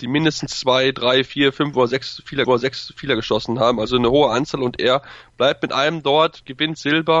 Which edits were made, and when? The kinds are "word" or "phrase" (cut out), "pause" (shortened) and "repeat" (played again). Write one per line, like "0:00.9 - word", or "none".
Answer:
0:02.4 - repeat